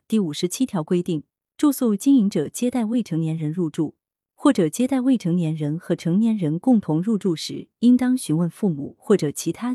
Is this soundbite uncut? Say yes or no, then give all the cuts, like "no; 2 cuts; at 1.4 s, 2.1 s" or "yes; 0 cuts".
yes; 0 cuts